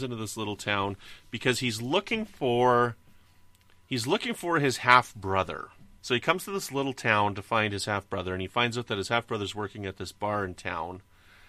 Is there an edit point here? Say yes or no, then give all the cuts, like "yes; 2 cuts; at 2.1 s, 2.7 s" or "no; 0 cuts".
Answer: yes; 1 cut; at 6.0 s